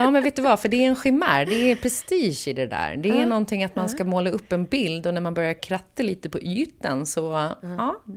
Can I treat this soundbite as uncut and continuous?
yes; 0 cuts

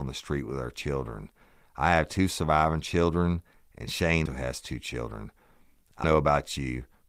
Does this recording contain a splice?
yes; 2 cuts; at 4.3 s, 6.0 s

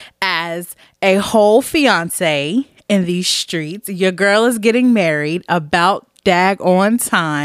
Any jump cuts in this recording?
no; 0 cuts

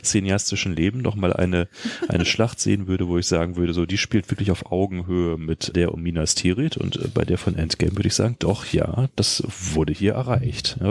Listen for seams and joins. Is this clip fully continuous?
no; 1 cut; at 5.7 s

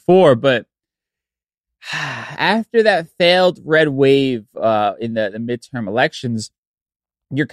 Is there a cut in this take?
no; 0 cuts

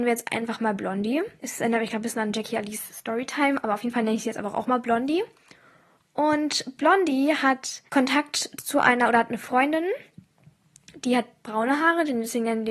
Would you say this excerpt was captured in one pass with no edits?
no; 2 cuts; at 1.4 s, 7.9 s

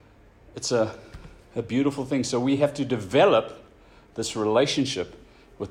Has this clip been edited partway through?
no; 0 cuts

